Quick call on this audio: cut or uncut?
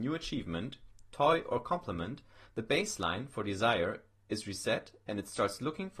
uncut